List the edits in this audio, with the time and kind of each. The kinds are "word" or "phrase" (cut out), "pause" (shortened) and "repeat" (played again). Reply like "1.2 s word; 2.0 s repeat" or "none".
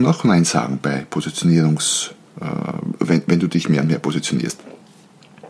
none